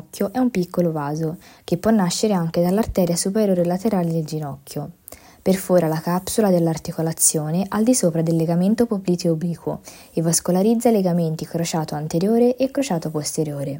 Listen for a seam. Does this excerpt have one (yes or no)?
no